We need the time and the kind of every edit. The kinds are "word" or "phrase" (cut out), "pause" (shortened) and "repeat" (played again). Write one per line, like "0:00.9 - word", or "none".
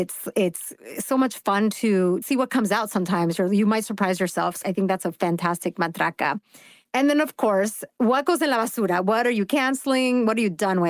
0:02.2 - word
0:04.6 - word